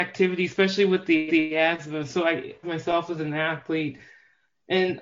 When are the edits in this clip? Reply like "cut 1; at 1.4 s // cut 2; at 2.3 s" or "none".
cut 1; at 1.3 s // cut 2; at 2.6 s